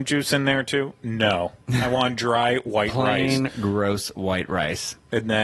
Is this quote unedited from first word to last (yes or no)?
no